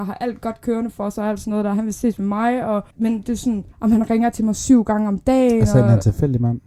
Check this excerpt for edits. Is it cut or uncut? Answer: cut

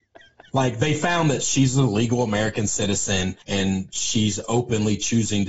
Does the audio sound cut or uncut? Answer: cut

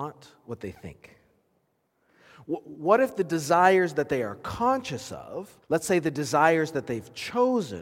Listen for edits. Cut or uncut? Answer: cut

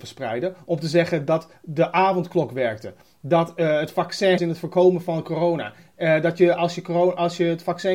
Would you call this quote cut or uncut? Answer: cut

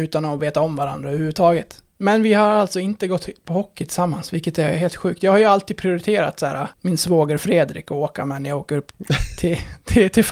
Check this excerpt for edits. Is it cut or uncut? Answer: cut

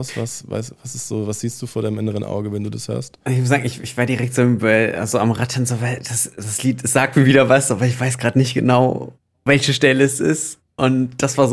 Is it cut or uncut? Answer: uncut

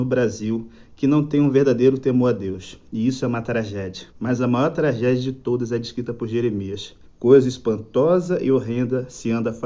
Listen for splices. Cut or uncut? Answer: cut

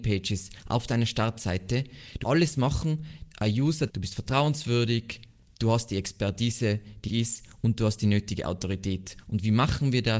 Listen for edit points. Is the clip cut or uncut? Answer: cut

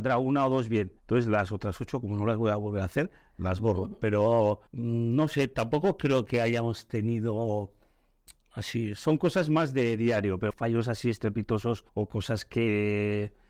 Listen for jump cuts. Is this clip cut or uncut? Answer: cut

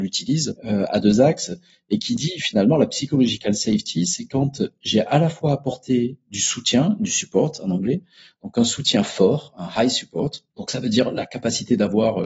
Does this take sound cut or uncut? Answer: uncut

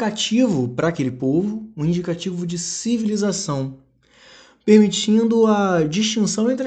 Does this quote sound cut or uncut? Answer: uncut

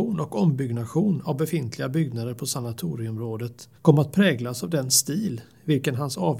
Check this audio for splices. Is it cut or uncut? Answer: cut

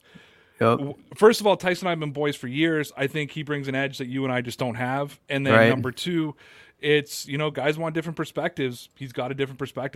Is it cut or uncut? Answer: uncut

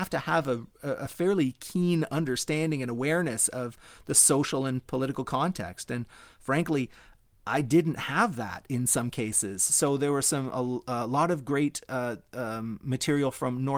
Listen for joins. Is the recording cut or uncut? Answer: uncut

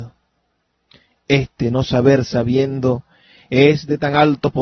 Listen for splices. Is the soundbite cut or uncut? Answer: uncut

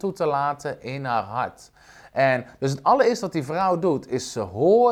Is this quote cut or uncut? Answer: uncut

